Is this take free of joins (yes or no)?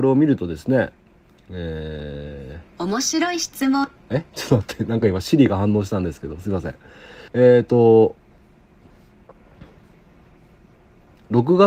no